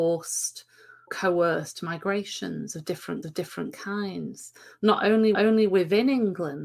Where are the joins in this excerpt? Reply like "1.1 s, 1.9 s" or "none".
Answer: 1.1 s, 3.2 s, 5.3 s